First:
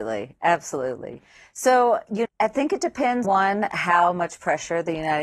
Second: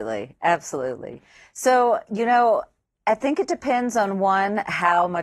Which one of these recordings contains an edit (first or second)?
first